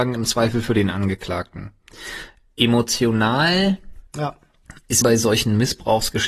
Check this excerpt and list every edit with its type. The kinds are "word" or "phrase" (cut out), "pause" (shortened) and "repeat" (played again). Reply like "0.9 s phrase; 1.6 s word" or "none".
4.1 s pause; 5.0 s phrase